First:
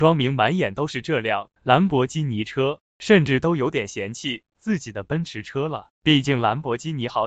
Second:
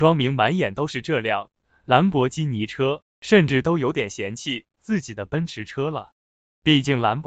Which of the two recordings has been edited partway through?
first; 2 cuts; at 1.6 s, 5.9 s

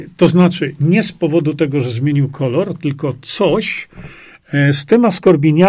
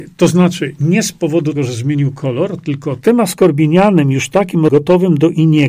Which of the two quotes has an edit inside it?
second; 3 cuts; at 1.6 s, 3.0 s, 4.7 s

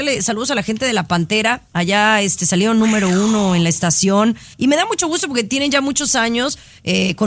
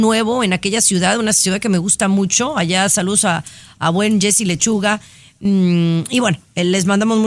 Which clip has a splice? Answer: first; 1 cut; at 4.5 s

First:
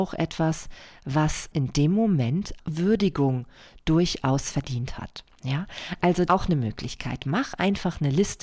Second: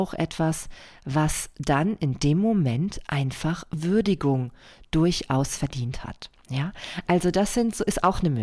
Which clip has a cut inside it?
first; 3 cuts; at 1.5 s, 2.6 s, 6.3 s

